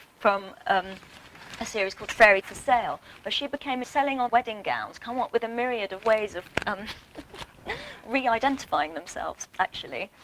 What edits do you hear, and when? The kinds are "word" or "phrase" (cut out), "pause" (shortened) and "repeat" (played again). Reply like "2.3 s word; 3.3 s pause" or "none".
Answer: 2.4 s word; 3.8 s word; 4.3 s word; 8.0 s word